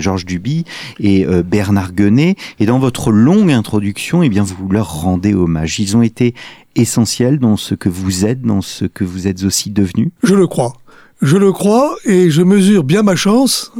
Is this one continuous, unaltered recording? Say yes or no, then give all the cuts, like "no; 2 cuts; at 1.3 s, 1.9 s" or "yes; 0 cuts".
no; 1 cut; at 10.2 s